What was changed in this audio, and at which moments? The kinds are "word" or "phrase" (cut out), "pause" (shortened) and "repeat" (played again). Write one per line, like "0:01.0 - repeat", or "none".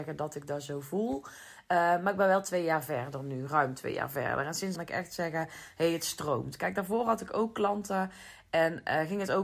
0:04.8 - phrase